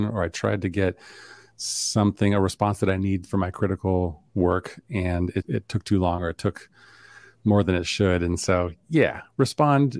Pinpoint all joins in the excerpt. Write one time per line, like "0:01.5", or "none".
0:05.4